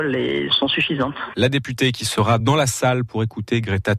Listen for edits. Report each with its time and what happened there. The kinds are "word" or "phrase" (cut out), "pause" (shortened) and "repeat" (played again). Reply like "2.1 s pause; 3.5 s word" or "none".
none